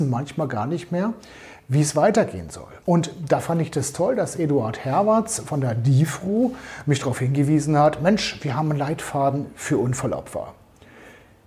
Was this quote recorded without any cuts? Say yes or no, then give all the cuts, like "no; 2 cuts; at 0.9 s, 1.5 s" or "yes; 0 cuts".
no; 1 cut; at 2.8 s